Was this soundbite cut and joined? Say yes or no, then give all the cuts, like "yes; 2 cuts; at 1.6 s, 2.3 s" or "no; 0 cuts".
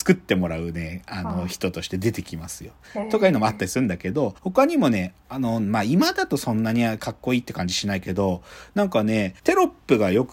yes; 2 cuts; at 4.4 s, 9.4 s